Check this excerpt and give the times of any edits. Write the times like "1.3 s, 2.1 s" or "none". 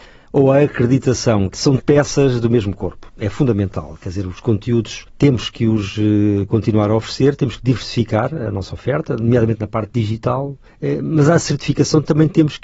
1.8 s